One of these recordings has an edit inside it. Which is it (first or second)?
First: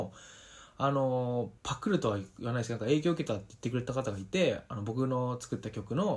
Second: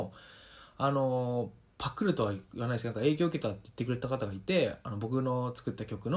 first